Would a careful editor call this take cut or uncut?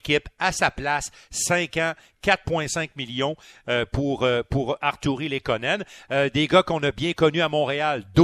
uncut